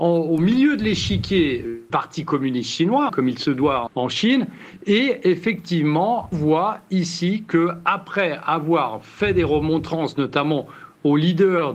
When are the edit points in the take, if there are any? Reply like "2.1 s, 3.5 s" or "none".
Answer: 1.9 s, 3.1 s, 3.9 s, 6.3 s